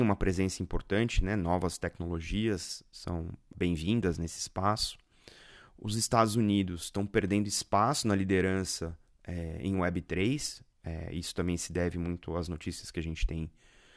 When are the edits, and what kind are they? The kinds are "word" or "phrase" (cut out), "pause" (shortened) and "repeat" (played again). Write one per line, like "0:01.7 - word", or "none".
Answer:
0:03.5 - word